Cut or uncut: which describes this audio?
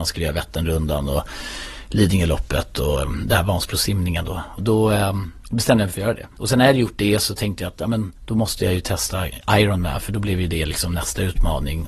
cut